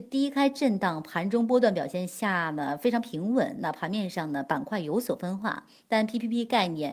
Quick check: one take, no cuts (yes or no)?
yes